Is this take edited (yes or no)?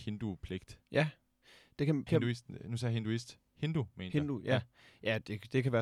yes